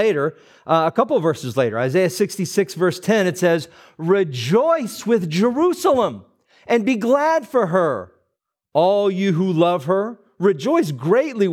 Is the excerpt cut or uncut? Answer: uncut